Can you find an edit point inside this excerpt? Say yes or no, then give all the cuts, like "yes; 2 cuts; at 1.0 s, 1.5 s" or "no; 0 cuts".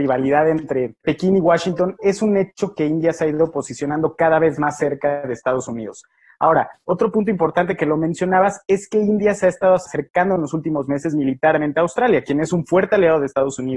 no; 0 cuts